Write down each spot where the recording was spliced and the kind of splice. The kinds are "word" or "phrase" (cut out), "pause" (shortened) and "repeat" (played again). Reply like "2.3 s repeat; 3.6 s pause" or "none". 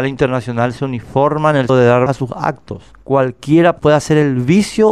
1.7 s word; 2.1 s word